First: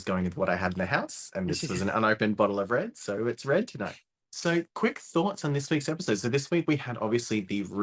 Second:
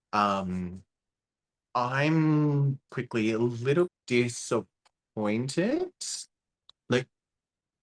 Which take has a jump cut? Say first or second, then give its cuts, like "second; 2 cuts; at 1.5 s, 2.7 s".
second; 2 cuts; at 2.9 s, 3.9 s